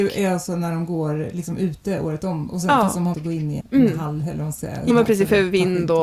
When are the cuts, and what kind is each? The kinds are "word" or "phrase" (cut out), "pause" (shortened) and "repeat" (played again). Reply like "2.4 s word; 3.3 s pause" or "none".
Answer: 3.1 s word; 3.6 s word; 4.9 s word